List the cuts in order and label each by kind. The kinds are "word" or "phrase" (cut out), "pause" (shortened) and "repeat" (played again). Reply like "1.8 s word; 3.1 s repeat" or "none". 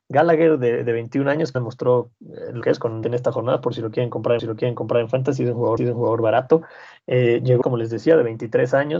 1.5 s word; 2.6 s word; 3.0 s word; 4.4 s repeat; 5.8 s repeat; 7.6 s word